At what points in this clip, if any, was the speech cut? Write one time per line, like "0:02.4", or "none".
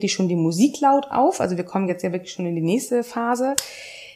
none